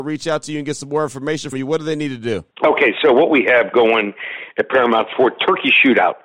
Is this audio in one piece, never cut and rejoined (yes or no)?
no